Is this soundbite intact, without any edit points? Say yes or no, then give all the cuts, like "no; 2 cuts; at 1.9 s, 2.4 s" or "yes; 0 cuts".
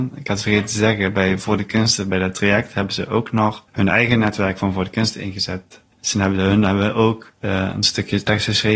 no; 3 cuts; at 3.7 s, 5.9 s, 7.4 s